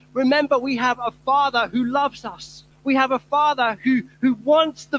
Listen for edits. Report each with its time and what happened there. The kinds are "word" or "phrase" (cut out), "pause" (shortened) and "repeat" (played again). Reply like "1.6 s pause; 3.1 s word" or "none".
2.7 s pause